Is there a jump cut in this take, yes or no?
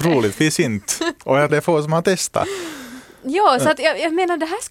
yes